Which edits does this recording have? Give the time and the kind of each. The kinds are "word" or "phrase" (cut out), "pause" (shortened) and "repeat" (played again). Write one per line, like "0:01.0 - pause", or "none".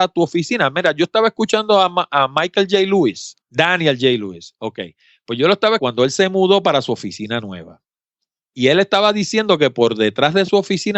0:03.4 - pause
0:05.8 - word